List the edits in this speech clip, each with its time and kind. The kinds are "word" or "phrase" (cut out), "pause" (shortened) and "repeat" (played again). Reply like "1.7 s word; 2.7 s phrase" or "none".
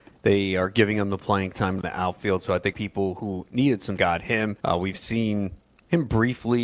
1.8 s word; 2.7 s phrase; 4.0 s phrase; 4.6 s pause

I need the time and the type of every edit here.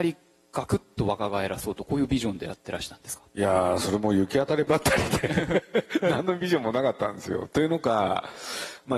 3.3 s pause

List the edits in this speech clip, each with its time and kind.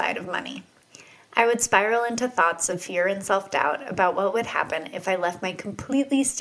none

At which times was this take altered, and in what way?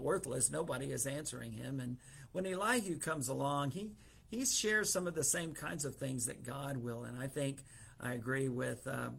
none

